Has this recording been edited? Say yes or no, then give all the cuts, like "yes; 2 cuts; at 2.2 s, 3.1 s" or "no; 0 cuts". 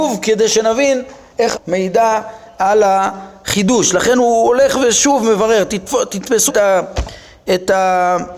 yes; 2 cuts; at 1.5 s, 6.5 s